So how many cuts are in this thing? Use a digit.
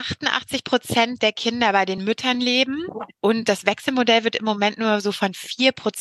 0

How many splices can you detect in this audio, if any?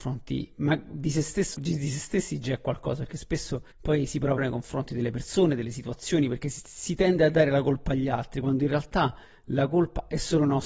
3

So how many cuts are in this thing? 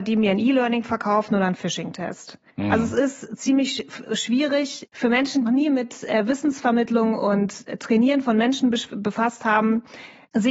2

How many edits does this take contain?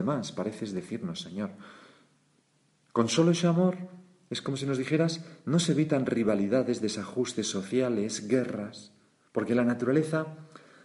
0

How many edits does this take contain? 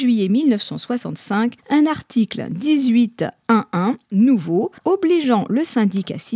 2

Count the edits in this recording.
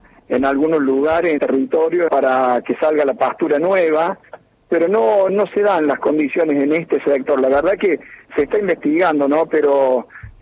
3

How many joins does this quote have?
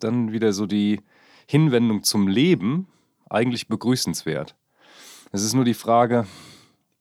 0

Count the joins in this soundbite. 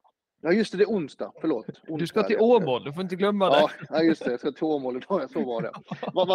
0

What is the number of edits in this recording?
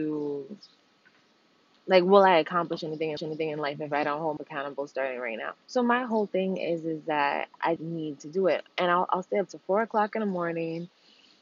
4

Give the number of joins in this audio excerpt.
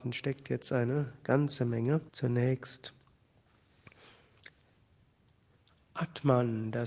1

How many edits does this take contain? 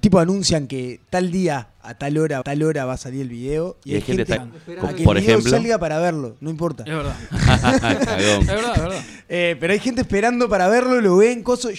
2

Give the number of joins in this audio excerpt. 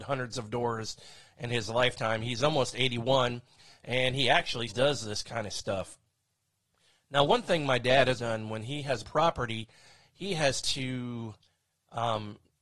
4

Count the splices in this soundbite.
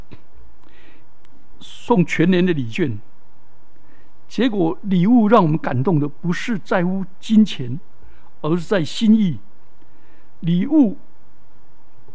1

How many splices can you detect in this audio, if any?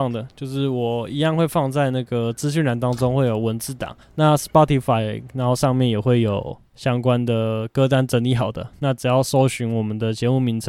1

